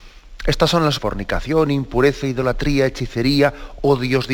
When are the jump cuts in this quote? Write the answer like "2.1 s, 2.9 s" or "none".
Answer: 1.0 s, 2.2 s

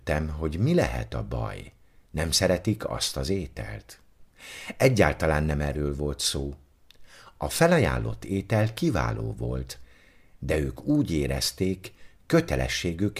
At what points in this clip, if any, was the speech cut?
none

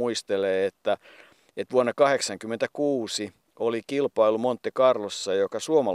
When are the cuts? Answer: none

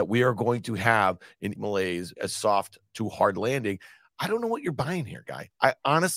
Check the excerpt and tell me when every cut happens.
1.6 s, 2.2 s

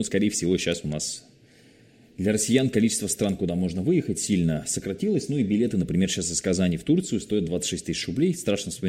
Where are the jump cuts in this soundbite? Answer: none

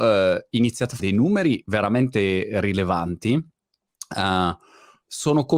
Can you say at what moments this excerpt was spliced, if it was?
1.0 s

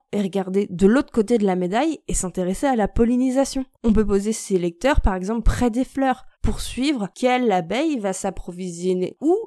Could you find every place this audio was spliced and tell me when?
3.7 s, 6.3 s

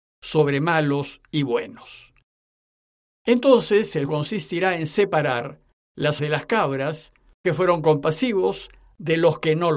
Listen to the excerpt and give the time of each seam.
4.1 s, 6.2 s, 7.4 s

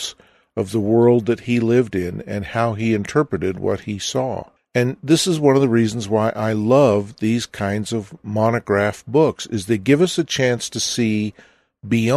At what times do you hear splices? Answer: 4.6 s

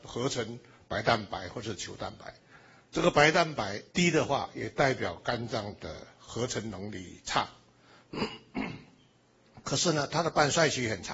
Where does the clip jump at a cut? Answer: 3.9 s

